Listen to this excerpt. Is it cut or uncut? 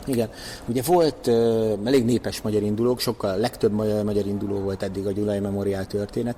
uncut